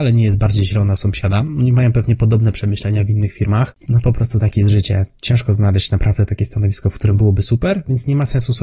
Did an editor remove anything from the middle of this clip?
no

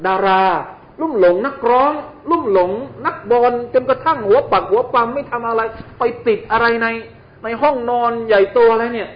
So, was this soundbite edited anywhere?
no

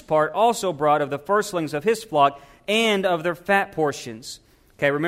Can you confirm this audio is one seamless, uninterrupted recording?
yes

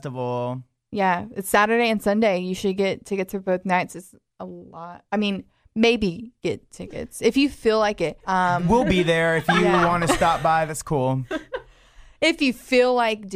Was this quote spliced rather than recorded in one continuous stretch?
yes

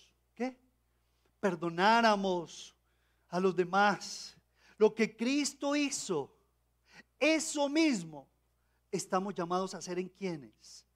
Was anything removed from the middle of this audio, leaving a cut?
no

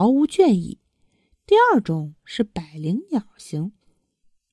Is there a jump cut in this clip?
no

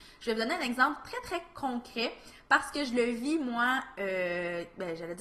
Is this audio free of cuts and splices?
yes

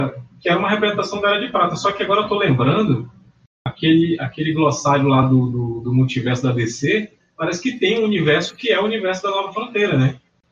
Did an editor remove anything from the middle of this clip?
no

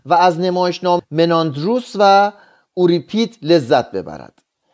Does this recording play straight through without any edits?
no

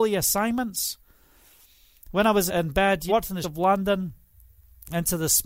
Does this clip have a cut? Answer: yes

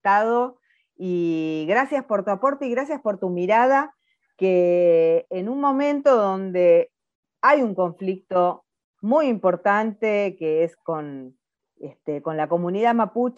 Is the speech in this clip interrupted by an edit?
no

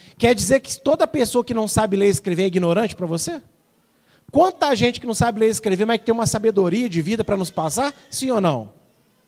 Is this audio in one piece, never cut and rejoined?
no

